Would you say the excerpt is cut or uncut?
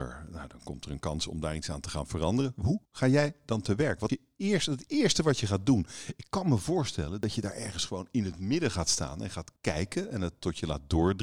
cut